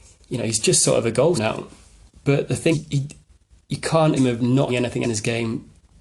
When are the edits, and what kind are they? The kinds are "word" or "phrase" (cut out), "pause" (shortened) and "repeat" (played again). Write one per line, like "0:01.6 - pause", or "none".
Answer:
0:01.3 - word
0:02.7 - word
0:04.2 - word
0:04.7 - word
0:05.0 - word